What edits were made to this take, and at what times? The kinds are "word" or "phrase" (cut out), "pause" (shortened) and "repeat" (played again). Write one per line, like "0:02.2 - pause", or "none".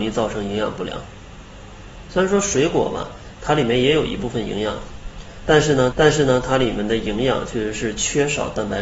0:05.9 - repeat

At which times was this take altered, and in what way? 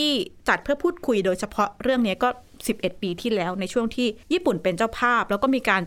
0:04.2 - pause

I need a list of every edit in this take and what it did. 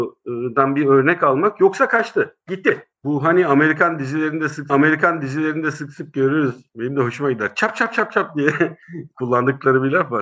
0:02.9 - pause
0:04.7 - repeat
0:08.8 - pause

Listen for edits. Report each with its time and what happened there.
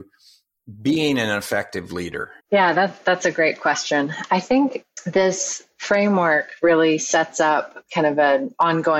0:02.4 - pause

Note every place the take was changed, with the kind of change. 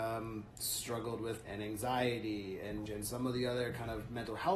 0:01.4 - word
0:02.9 - word

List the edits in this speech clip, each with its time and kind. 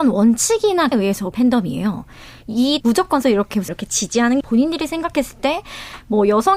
0:00.9 - word
0:01.3 - word
0:02.8 - word
0:03.2 - word
0:03.7 - word
0:04.4 - word

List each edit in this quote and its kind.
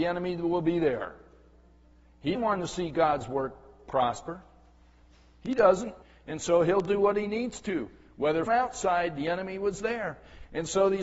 0:02.3 - word
0:06.0 - pause
0:08.5 - phrase

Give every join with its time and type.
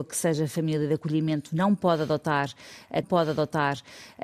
0:03.0 - repeat

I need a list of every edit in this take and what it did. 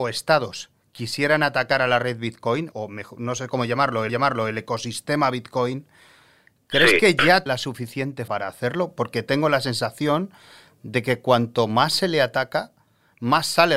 0:02.7 - word
0:04.1 - repeat
0:07.5 - word
0:08.3 - word

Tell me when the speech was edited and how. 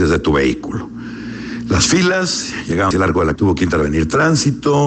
0:02.9 - word
0:03.4 - word

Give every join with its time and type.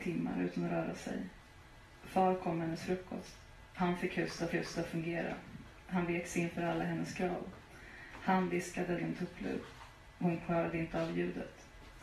0:04.5 - repeat
0:09.0 - phrase

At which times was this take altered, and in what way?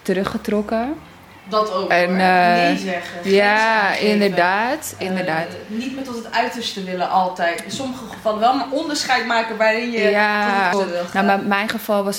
0:10.7 - word

